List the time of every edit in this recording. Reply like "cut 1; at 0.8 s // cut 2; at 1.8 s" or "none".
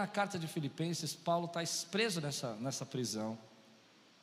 none